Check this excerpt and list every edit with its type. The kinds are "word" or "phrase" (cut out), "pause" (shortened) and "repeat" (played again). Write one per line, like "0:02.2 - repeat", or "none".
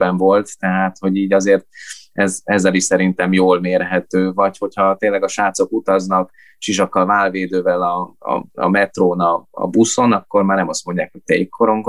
none